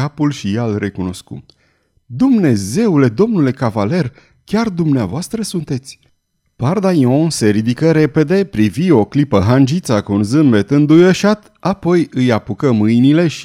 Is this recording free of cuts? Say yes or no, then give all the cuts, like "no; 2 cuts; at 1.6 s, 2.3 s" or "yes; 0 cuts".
yes; 0 cuts